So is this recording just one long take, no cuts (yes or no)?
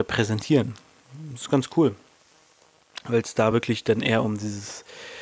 yes